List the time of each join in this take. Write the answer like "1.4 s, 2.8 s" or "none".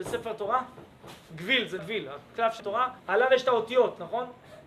1.8 s, 2.6 s, 3.0 s